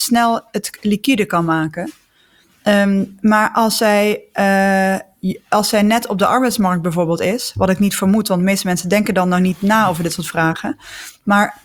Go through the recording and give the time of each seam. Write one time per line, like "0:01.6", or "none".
none